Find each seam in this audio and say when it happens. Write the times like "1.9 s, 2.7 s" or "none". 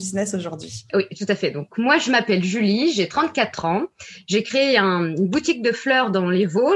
none